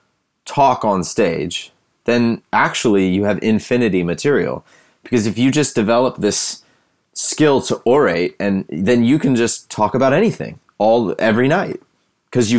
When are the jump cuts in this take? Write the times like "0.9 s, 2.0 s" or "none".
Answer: none